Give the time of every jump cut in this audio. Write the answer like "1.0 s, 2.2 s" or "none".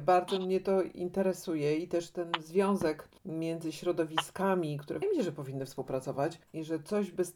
3.2 s, 5.0 s, 6.4 s

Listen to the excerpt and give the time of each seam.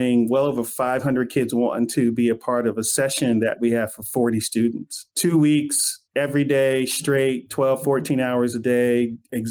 5.1 s, 6.1 s

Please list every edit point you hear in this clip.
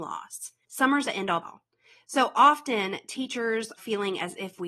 1.0 s, 1.4 s, 3.8 s

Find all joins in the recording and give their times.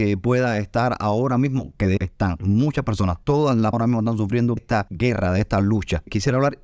2.0 s, 3.7 s, 4.6 s

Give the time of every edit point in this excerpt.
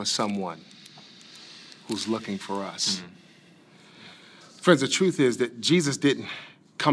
none

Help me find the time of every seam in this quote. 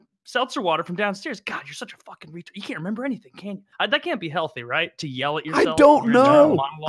3.7 s

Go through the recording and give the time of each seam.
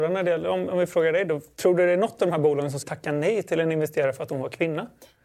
2.8 s

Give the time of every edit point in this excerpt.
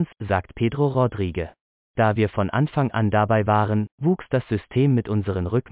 none

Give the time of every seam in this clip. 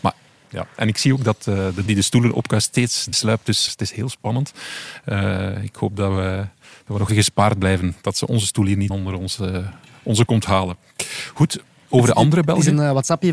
1.9 s, 3.1 s, 3.7 s, 7.1 s, 8.9 s, 10.3 s

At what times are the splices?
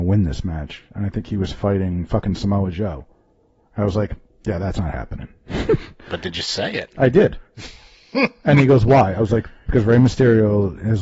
none

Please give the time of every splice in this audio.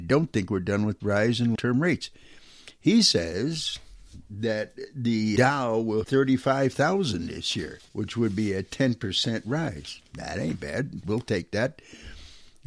1.0 s, 1.5 s, 5.4 s, 6.0 s, 7.9 s, 10.1 s

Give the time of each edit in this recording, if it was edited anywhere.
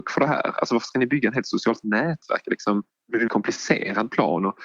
2.9 s, 3.3 s

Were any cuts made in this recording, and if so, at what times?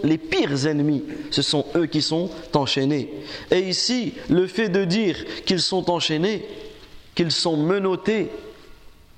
7.1 s

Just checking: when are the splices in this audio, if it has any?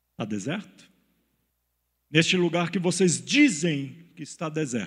1.5 s

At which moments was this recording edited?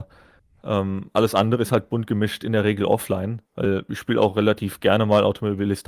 3.5 s

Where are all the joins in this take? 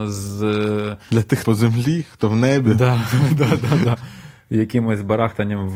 1.4 s

